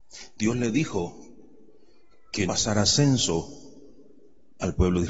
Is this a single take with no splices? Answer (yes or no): no